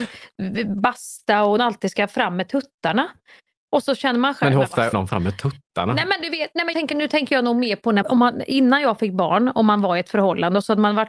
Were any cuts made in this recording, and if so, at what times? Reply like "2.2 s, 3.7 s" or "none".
1.6 s, 4.9 s, 6.7 s, 8.0 s